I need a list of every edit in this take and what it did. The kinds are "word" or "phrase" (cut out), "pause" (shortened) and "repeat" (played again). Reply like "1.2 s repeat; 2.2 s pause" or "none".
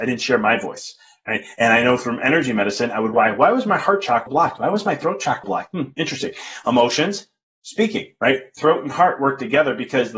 3.1 s word; 4.3 s word; 5.4 s word